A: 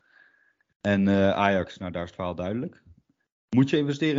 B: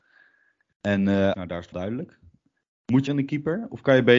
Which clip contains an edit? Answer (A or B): B